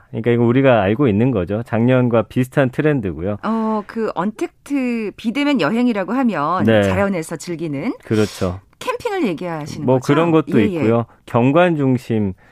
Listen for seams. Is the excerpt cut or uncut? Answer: uncut